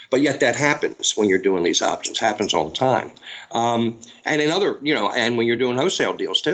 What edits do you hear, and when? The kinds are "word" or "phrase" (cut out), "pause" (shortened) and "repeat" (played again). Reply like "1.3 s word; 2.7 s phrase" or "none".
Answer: none